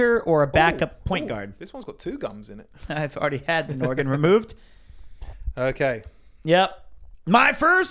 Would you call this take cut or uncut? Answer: uncut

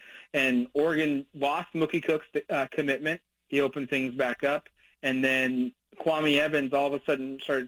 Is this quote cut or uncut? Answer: uncut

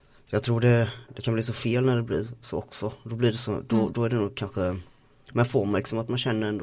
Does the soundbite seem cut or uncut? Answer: uncut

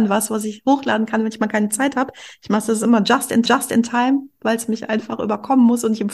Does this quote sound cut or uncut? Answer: cut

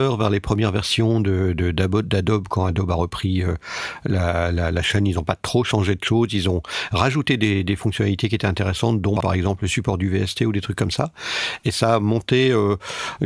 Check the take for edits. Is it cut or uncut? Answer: uncut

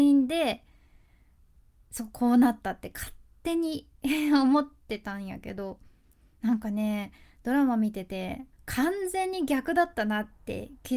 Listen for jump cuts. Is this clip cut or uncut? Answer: cut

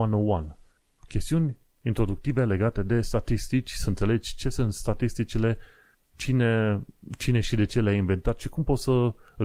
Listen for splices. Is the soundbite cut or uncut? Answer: uncut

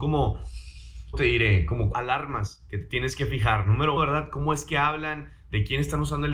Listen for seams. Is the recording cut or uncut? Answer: cut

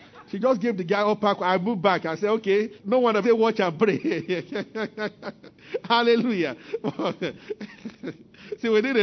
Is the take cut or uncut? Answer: cut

